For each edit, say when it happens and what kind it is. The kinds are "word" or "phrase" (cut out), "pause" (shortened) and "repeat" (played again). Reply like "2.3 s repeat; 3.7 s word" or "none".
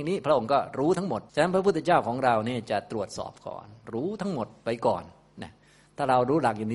1.3 s pause